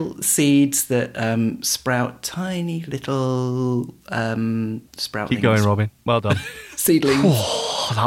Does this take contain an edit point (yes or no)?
yes